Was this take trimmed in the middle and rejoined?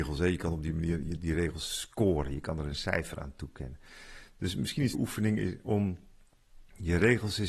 yes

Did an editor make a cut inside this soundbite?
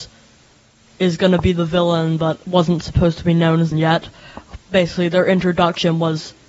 yes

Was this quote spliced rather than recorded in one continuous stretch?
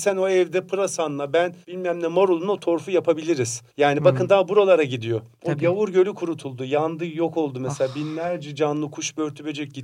yes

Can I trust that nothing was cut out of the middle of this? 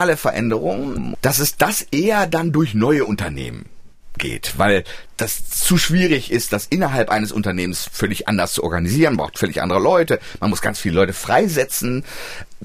yes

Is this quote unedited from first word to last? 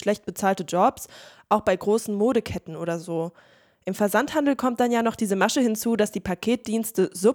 yes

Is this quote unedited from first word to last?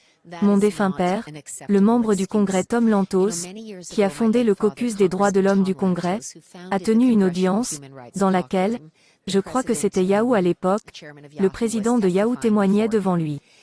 yes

